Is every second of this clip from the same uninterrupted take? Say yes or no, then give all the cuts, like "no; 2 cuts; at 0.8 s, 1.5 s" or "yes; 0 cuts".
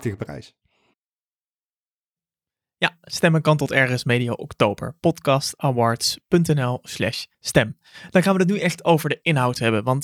no; 1 cut; at 7.3 s